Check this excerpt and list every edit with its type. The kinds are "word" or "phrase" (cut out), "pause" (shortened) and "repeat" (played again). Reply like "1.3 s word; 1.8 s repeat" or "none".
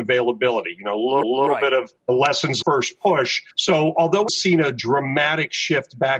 1.2 s repeat; 2.0 s pause; 2.6 s phrase; 3.5 s pause; 4.3 s word